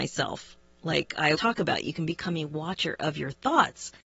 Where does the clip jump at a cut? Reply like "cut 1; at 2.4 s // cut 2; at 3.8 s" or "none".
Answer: cut 1; at 1.3 s